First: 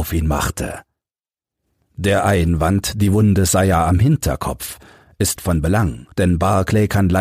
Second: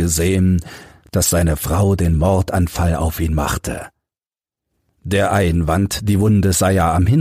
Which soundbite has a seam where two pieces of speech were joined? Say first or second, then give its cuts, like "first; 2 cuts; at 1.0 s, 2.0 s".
first; 2 cuts; at 5.4 s, 6.1 s